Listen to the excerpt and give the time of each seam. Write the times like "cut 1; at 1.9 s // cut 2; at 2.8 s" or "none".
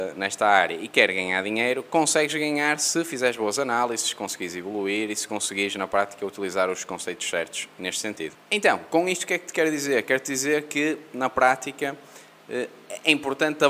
none